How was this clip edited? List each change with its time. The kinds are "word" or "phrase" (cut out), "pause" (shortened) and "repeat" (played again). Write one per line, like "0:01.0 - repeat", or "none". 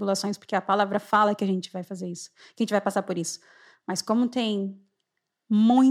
none